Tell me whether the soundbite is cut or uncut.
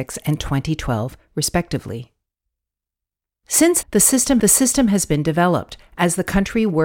cut